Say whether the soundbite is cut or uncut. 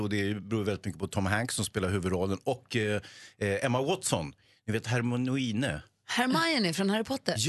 uncut